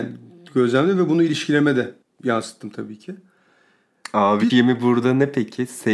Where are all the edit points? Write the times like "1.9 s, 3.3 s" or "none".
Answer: 2.0 s, 4.5 s

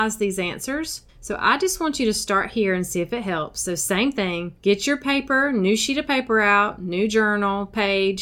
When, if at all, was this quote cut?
1.1 s, 4.6 s

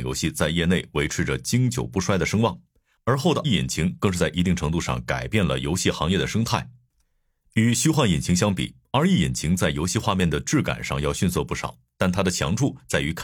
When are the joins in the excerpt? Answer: 3.4 s

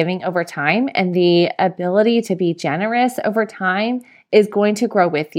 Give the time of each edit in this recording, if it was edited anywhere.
none

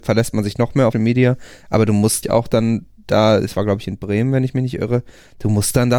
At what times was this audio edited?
0.9 s, 2.2 s

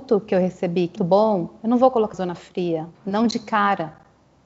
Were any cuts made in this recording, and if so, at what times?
1.0 s, 2.1 s, 2.9 s

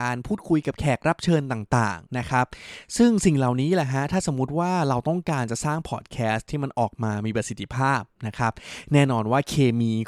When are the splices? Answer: 2.1 s

